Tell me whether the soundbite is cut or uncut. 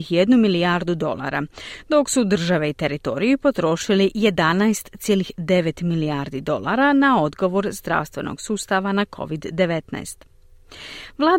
uncut